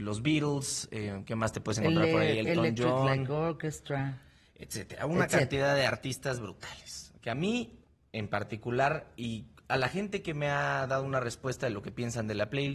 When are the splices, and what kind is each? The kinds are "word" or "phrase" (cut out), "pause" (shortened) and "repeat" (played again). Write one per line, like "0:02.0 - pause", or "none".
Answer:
none